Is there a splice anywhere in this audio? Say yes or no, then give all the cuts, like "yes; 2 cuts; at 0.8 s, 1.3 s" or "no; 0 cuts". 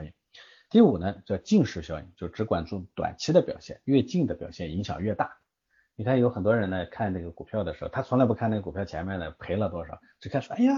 no; 0 cuts